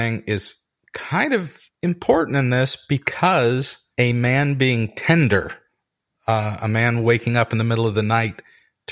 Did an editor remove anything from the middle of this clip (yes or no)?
yes